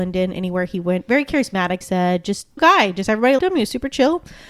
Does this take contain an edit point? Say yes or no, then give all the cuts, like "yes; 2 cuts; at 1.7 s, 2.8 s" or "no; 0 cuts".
yes; 3 cuts; at 1.8 s, 2.6 s, 3.4 s